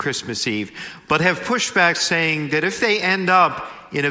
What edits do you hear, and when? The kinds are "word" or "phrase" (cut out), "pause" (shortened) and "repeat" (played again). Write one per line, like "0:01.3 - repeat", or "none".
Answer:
none